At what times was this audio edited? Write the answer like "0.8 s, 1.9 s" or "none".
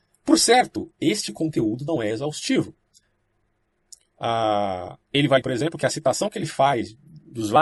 5.0 s, 5.4 s